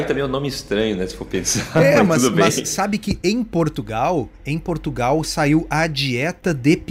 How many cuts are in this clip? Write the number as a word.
zero